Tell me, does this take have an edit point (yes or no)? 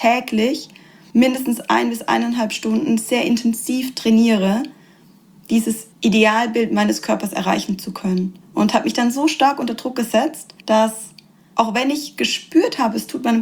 yes